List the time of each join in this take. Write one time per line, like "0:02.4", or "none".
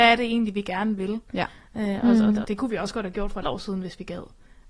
0:02.4
0:03.4

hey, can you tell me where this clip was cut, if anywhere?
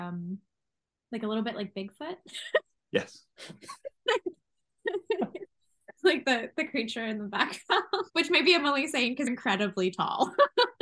0:08.1
0:09.3

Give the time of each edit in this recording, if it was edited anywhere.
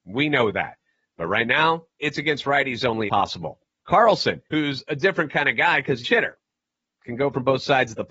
0:01.9
0:03.1
0:04.5
0:06.0

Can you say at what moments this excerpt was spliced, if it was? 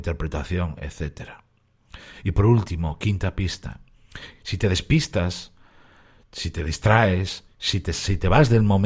none

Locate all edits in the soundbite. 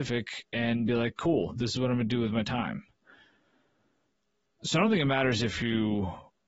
none

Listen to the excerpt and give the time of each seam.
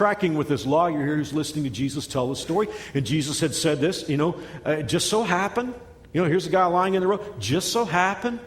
none

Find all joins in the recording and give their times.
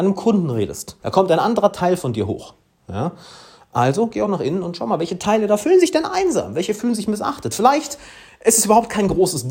0:01.0

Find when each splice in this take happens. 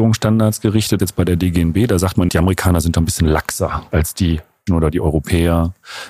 0:01.0
0:02.3
0:03.9
0:04.7

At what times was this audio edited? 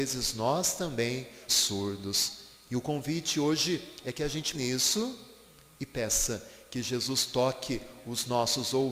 0:01.5
0:04.5

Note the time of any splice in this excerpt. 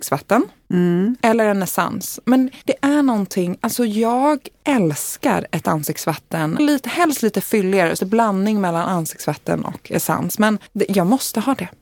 0:02.6
0:06.6
0:08.0
0:10.7

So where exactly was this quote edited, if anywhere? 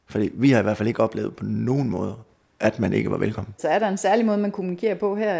none

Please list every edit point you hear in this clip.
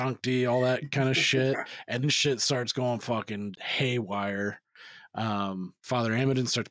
0:02.0
0:03.5
0:05.8

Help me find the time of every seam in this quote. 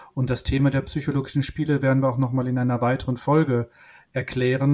none

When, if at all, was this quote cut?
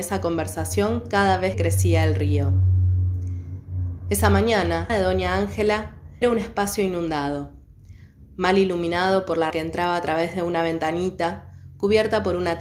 0:01.5
0:04.9
0:06.2
0:09.5

